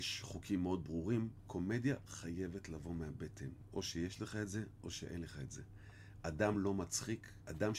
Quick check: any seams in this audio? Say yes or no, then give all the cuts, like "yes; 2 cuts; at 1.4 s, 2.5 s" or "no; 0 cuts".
no; 0 cuts